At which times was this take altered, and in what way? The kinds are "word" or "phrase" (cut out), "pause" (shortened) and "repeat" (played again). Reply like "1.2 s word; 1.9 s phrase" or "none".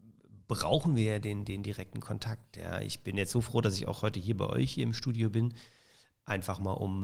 none